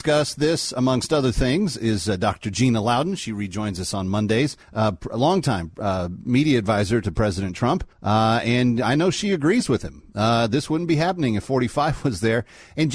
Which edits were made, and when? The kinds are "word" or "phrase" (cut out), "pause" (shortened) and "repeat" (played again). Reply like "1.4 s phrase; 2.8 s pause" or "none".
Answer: 4.6 s pause; 7.9 s pause

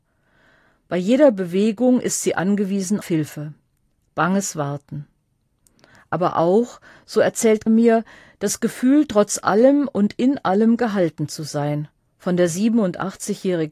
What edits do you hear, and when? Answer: 3.0 s word; 7.7 s word; 12.1 s pause

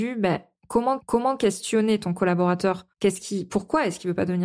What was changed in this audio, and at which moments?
1.0 s repeat; 2.9 s pause

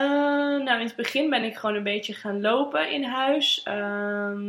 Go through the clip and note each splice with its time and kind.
none

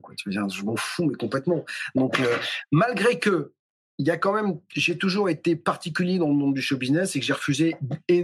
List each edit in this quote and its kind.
3.7 s pause

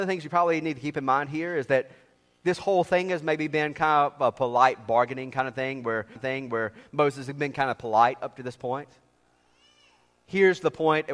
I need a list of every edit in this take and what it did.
6.2 s repeat

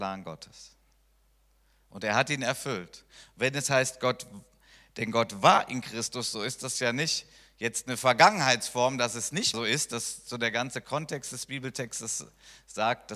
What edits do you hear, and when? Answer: 9.5 s word

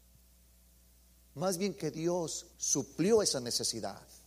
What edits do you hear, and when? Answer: 1.8 s word; 2.5 s pause

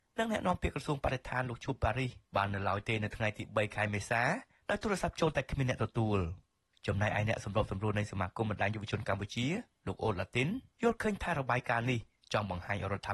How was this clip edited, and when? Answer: none

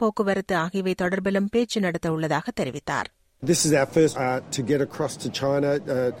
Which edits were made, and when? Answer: 3.4 s word; 4.1 s phrase

